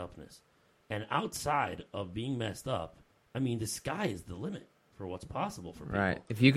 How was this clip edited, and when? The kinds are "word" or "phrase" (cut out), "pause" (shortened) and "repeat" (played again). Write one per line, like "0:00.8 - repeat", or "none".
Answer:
none